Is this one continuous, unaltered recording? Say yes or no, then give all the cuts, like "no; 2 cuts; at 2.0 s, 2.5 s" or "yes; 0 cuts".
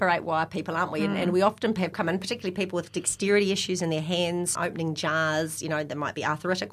no; 2 cuts; at 1.9 s, 4.6 s